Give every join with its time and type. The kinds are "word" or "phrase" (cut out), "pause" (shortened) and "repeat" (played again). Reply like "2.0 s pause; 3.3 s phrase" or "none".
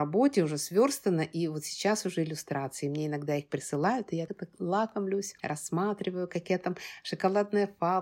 4.3 s word; 5.4 s pause